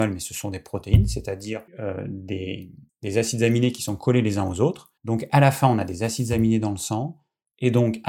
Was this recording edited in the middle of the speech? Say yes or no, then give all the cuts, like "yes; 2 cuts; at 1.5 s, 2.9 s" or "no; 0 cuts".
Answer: yes; 3 cuts; at 1.7 s, 2.9 s, 5.0 s